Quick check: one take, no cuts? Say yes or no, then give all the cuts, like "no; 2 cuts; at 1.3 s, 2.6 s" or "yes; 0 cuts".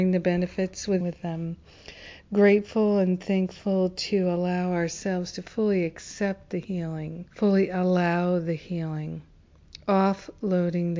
no; 2 cuts; at 1.0 s, 7.3 s